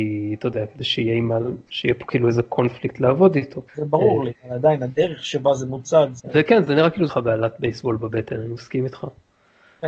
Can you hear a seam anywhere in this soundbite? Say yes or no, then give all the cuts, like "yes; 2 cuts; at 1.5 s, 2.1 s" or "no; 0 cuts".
yes; 3 cuts; at 3.7 s, 4.4 s, 7.1 s